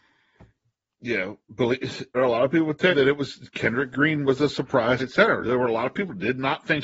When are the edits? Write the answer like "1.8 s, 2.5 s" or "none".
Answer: 2.1 s, 2.9 s, 5.0 s